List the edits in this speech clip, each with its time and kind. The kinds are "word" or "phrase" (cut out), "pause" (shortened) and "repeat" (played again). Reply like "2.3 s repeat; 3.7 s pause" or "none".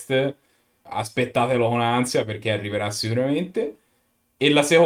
none